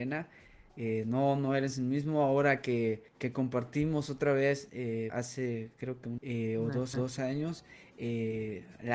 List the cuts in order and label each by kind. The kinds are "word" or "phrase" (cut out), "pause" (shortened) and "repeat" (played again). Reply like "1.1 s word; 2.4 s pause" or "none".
3.1 s pause; 5.1 s word; 6.2 s word; 6.9 s repeat